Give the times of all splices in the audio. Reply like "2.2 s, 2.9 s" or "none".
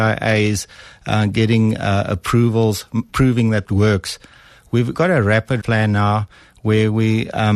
3.1 s, 3.6 s, 4.9 s, 5.6 s